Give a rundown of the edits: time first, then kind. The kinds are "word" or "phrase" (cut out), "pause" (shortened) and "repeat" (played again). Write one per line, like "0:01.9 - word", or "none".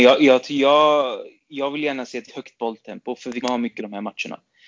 0:02.3 - word
0:03.4 - word
0:03.8 - word